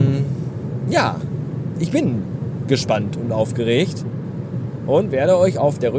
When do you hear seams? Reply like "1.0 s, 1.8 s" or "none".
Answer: none

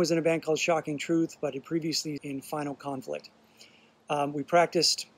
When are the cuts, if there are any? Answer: 2.2 s

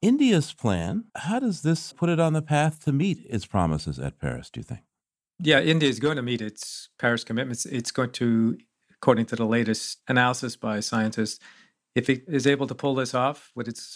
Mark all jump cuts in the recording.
1.1 s, 1.9 s

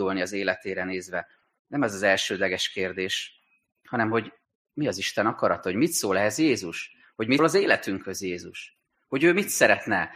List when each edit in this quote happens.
7.4 s

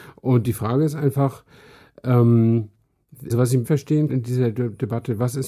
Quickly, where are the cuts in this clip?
3.3 s, 3.6 s, 4.1 s

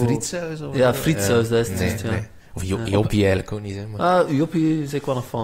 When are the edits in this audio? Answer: none

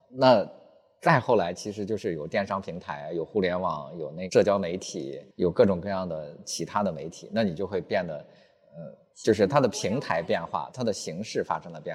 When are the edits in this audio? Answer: 5.3 s, 9.1 s

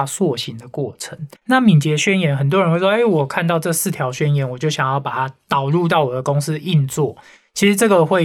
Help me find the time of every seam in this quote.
1.4 s

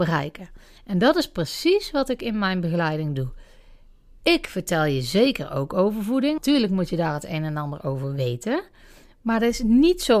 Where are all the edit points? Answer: 6.4 s

